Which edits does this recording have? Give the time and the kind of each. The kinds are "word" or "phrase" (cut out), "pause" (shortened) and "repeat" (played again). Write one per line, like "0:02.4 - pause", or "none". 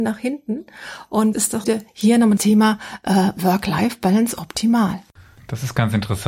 0:01.3 - word
0:01.6 - word
0:02.4 - word